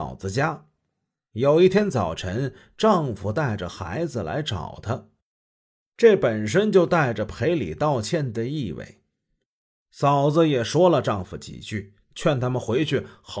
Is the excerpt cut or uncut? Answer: uncut